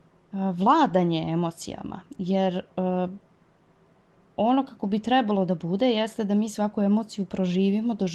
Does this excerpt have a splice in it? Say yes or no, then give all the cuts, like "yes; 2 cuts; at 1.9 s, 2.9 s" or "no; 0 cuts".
no; 0 cuts